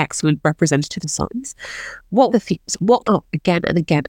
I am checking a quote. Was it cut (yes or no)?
yes